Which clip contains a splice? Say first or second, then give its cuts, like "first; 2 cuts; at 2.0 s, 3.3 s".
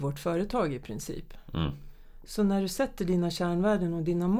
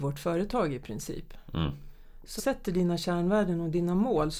second; 1 cut; at 2.4 s